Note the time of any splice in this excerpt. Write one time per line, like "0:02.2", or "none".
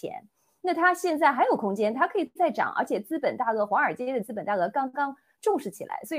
none